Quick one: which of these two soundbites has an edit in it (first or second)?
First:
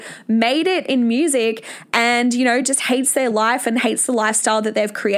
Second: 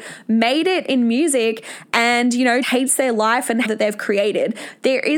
second